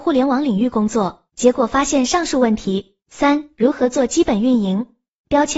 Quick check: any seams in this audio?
yes; 2 cuts; at 1.3 s, 3.0 s

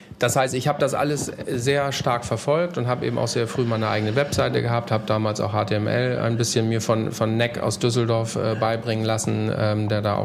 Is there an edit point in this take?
no; 0 cuts

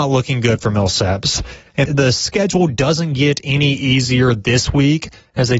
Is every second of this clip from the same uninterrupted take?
no; 1 cut; at 1.9 s

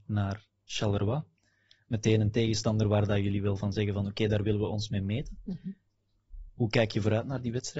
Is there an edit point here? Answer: no; 0 cuts

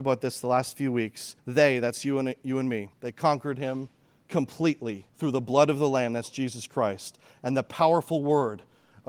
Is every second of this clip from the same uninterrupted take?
no; 3 cuts; at 1.4 s, 2.9 s, 5.1 s

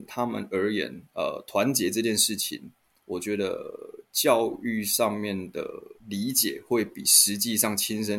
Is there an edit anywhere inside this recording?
no; 0 cuts

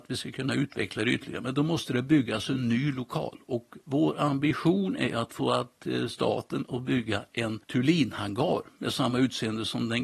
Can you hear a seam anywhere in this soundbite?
no; 0 cuts

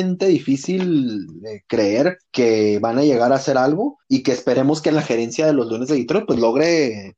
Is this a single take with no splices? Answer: no; 2 cuts; at 2.3 s, 4.0 s

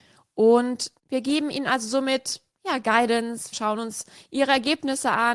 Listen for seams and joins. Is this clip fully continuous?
no; 2 cuts; at 1.0 s, 3.5 s

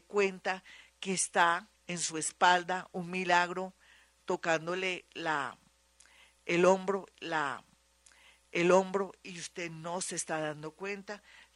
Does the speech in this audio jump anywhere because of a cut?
yes; 2 cuts; at 1.7 s, 7.1 s

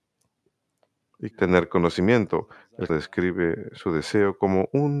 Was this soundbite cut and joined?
yes; 2 cuts; at 1.3 s, 2.9 s

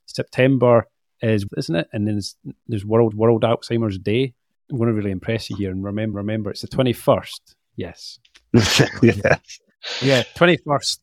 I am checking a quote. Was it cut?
yes; 4 cuts; at 1.5 s, 3.1 s, 6.1 s, 8.2 s

